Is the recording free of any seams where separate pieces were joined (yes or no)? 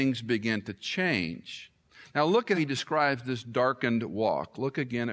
no